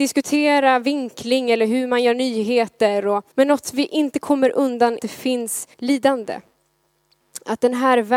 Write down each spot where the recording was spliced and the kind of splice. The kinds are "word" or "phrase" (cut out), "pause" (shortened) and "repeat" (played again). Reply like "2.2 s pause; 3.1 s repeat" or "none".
3.3 s pause; 5.0 s phrase; 5.7 s pause